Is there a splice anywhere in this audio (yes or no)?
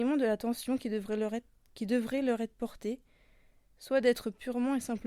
no